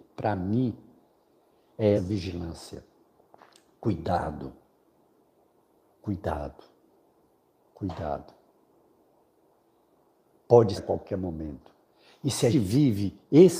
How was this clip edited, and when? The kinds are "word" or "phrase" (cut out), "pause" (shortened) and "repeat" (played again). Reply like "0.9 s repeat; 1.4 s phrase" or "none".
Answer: 1.9 s word; 10.8 s word; 12.5 s word